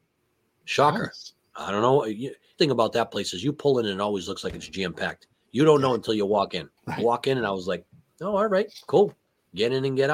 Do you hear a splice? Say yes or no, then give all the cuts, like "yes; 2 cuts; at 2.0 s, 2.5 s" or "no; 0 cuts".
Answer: yes; 2 cuts; at 2.6 s, 6.8 s